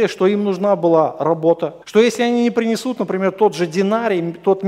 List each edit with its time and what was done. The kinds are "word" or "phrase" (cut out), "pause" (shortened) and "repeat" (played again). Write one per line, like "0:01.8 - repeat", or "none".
0:01.8 - pause